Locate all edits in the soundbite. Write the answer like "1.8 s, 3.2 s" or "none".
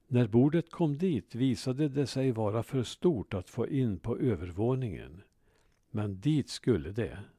none

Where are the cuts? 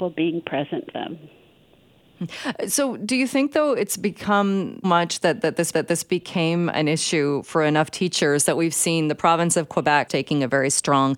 0.9 s, 4.8 s, 5.7 s, 10.1 s

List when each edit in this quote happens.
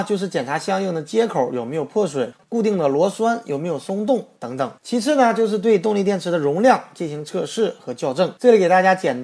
4.8 s

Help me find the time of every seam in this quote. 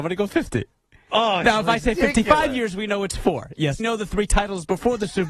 3.8 s

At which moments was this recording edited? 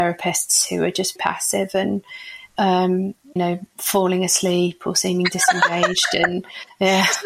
1.2 s, 3.4 s

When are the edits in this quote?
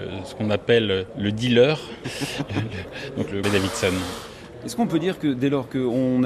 3.4 s

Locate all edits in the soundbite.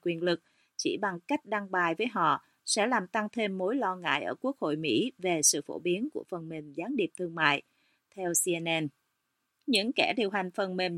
none

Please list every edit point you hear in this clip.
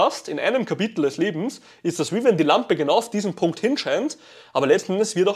none

